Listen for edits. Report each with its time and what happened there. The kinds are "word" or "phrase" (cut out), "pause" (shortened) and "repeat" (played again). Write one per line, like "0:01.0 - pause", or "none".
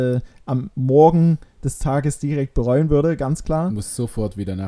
0:01.8 - word